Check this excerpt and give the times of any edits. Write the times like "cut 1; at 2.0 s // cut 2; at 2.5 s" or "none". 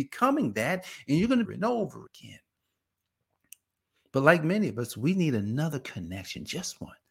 cut 1; at 1.4 s // cut 2; at 2.1 s